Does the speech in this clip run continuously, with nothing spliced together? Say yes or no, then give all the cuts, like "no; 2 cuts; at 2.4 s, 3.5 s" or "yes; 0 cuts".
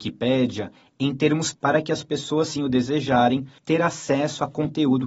no; 3 cuts; at 1.5 s, 2.6 s, 3.6 s